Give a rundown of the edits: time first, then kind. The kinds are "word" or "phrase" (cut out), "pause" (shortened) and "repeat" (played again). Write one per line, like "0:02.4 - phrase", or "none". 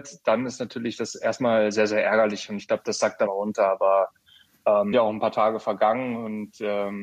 0:03.3 - phrase
0:04.9 - phrase